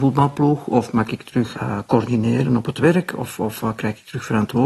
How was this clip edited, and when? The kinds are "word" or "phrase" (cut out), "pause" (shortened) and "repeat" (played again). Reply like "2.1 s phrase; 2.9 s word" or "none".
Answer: 1.5 s word